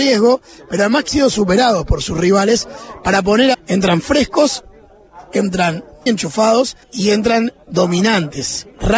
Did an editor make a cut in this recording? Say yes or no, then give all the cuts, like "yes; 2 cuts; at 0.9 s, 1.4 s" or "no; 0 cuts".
yes; 4 cuts; at 1.1 s, 3.5 s, 6.1 s, 6.8 s